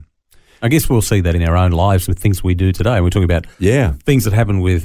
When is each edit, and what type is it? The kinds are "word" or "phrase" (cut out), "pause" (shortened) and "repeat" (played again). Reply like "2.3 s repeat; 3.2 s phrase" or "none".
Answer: 3.5 s pause